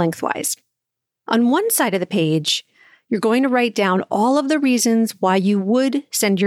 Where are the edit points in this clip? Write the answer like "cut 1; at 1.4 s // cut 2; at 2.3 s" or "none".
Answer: none